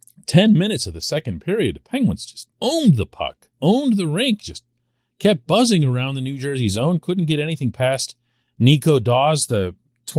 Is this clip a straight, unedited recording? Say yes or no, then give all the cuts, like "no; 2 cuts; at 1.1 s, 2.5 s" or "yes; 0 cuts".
no; 3 cuts; at 2.5 s, 3.5 s, 8.4 s